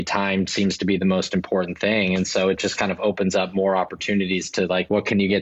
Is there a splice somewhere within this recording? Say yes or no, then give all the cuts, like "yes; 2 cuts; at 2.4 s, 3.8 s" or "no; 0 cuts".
no; 0 cuts